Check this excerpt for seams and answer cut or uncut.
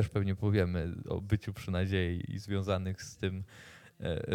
uncut